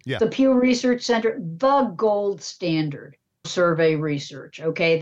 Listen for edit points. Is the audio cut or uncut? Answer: cut